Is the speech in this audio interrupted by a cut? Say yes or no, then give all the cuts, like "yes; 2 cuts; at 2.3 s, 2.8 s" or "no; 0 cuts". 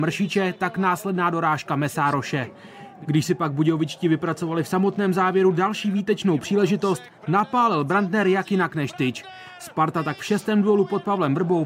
no; 0 cuts